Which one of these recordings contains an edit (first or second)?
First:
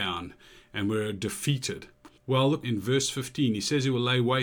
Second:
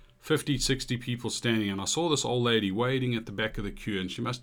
first